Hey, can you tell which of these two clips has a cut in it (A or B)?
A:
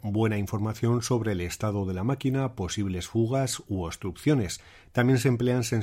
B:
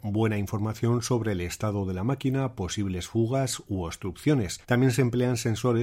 B